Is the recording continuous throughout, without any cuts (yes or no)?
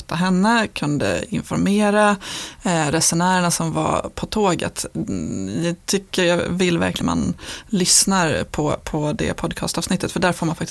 no